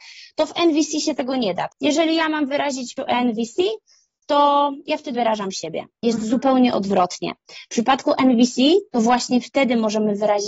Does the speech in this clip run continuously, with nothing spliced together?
no; 3 cuts; at 1.7 s, 3.0 s, 5.1 s

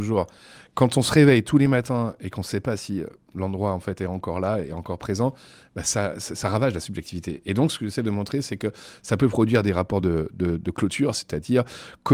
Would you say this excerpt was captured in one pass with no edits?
yes; 0 cuts

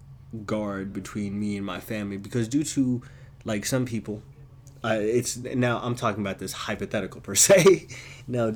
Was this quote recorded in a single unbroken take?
yes; 0 cuts

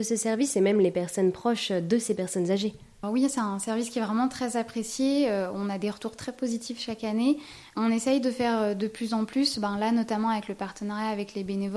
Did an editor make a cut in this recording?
yes; 1 cut; at 3.0 s

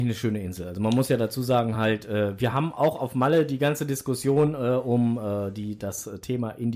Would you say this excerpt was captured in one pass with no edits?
yes; 0 cuts

